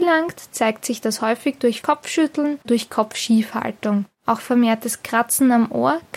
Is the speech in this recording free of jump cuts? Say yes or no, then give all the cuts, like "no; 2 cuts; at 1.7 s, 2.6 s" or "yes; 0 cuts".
no; 3 cuts; at 1.8 s, 2.6 s, 4.1 s